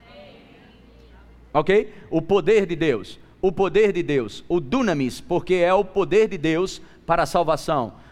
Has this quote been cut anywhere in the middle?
no; 0 cuts

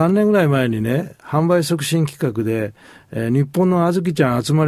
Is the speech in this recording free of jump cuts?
yes; 0 cuts

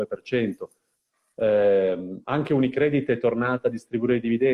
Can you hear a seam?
no; 0 cuts

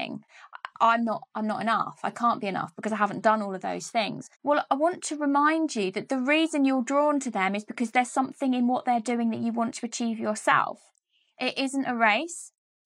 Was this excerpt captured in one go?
yes; 0 cuts

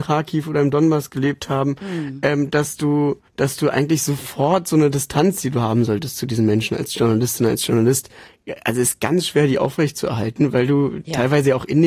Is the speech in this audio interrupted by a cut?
yes; 1 cut; at 3.3 s

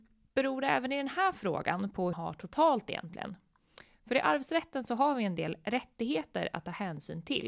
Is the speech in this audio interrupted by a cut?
yes; 1 cut; at 2.1 s

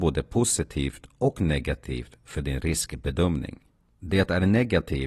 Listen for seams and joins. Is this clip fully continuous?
yes; 0 cuts

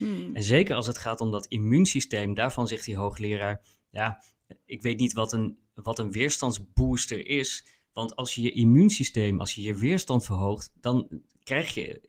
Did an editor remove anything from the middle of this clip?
no; 0 cuts

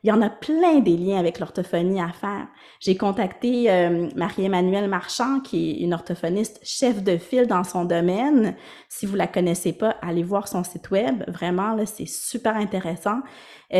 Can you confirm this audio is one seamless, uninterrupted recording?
yes; 0 cuts

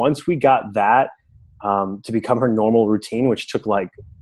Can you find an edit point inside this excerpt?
no; 0 cuts

